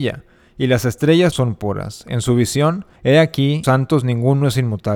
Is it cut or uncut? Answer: cut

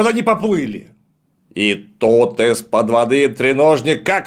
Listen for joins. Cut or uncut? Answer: uncut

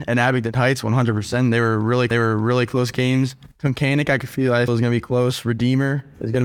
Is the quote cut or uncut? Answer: cut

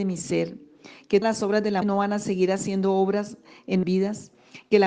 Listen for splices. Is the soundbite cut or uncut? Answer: cut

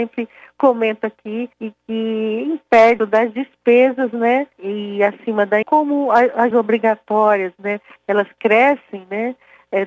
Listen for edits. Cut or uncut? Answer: cut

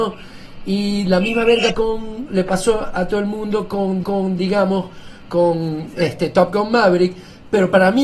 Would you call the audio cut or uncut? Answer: cut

